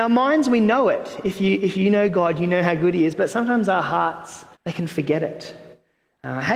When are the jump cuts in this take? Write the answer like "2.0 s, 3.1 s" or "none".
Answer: 4.5 s